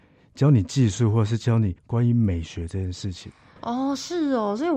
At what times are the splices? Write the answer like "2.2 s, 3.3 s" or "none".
1.8 s